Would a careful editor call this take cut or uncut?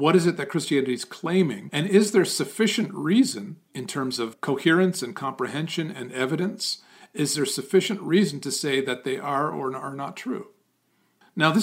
uncut